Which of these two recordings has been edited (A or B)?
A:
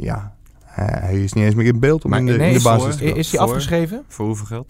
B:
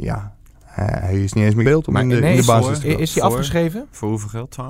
B